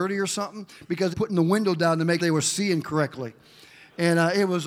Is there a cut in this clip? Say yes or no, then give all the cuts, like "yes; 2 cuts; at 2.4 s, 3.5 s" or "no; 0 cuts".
yes; 2 cuts; at 1.1 s, 2.2 s